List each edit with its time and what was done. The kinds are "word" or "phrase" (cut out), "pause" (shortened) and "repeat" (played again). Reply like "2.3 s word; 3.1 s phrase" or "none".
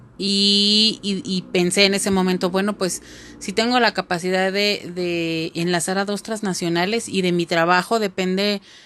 none